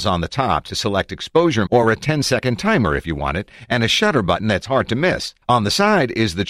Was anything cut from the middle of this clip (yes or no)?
yes